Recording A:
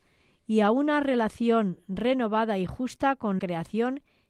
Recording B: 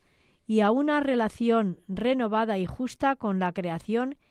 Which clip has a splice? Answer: A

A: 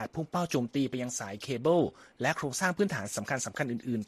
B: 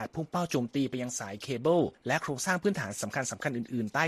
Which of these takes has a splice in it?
B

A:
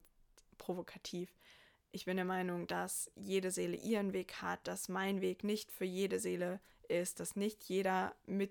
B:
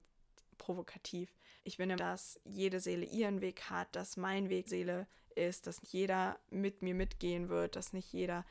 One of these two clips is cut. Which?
B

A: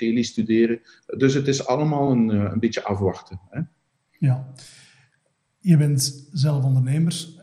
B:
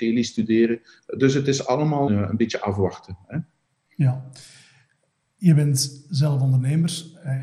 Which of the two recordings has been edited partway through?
B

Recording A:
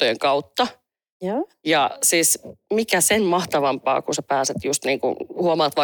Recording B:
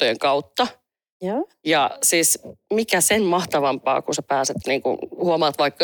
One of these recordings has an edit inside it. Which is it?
B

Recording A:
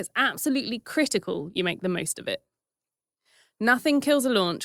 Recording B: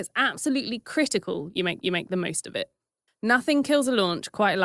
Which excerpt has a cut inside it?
B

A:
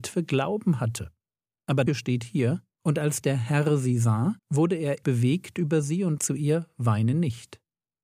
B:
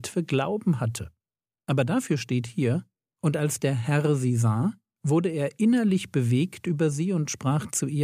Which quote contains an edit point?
A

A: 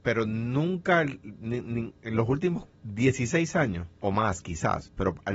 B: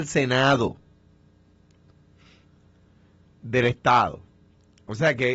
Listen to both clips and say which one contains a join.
A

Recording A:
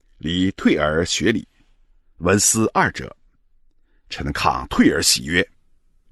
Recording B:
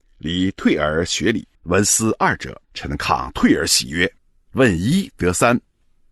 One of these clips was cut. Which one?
B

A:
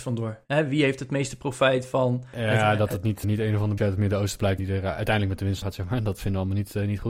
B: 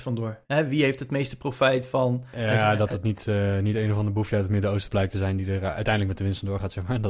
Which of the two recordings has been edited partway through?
A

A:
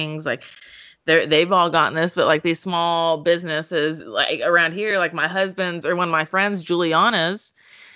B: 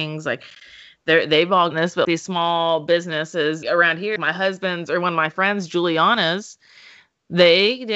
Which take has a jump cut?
B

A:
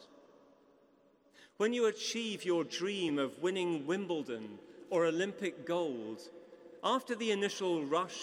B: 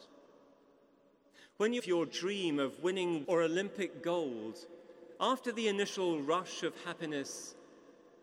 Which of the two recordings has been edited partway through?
B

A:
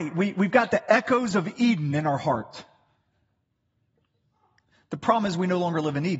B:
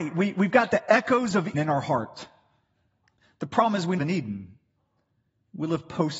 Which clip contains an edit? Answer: B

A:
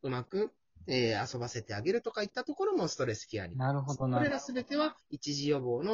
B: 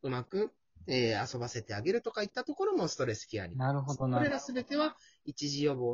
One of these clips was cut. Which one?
A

